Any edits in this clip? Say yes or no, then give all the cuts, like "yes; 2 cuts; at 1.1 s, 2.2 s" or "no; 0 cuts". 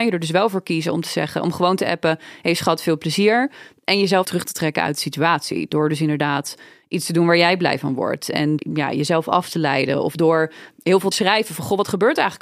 yes; 3 cuts; at 4.2 s, 8.6 s, 11.1 s